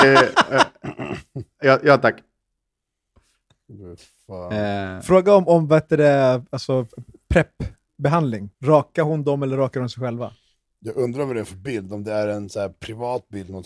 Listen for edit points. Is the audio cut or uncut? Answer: cut